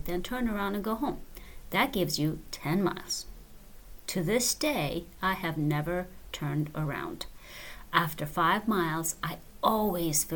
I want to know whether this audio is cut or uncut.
uncut